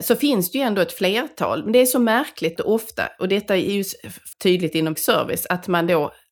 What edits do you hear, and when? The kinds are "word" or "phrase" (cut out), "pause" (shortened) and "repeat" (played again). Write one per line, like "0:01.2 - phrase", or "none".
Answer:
0:02.6 - word
0:04.3 - word
0:05.0 - word